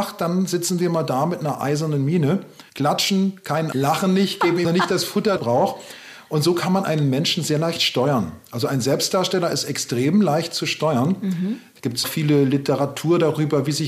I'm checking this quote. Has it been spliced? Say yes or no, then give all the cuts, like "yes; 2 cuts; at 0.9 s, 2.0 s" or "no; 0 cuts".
yes; 5 cuts; at 2.7 s, 3.7 s, 4.6 s, 5.4 s, 12.0 s